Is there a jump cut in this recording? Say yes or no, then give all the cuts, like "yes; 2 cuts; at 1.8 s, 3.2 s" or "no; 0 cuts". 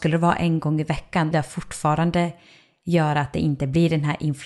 yes; 1 cut; at 1.3 s